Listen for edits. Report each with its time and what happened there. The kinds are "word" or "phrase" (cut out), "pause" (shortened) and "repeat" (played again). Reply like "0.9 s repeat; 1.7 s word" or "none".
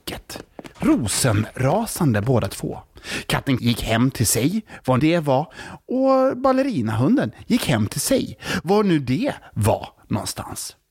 3.6 s word; 5.0 s word